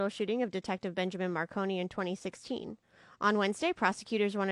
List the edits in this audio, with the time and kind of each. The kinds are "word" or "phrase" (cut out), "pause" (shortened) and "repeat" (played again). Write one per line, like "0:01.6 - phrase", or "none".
none